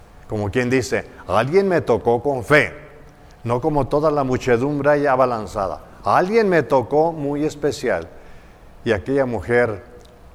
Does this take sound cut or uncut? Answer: uncut